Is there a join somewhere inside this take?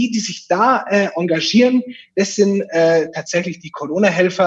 no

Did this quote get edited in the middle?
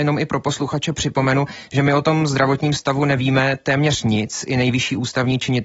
no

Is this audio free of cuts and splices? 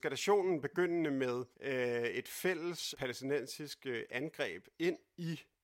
no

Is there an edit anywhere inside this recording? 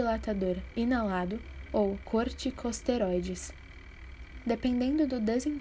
no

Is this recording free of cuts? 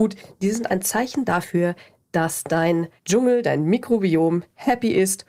no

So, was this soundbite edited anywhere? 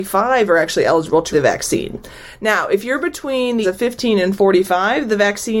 yes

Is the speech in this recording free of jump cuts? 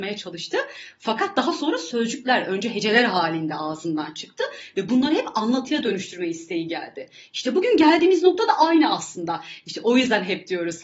yes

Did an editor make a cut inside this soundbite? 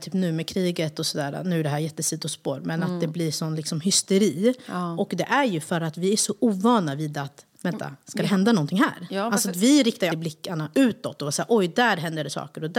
yes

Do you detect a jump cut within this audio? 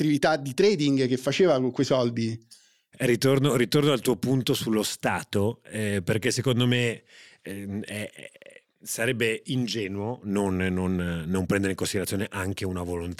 no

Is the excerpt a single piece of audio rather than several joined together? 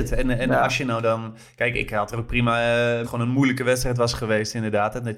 no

